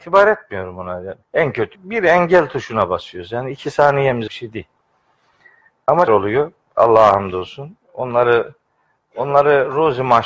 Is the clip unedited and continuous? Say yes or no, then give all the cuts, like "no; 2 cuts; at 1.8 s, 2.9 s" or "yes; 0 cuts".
no; 5 cuts; at 1.2 s, 1.7 s, 4.3 s, 6.1 s, 7.8 s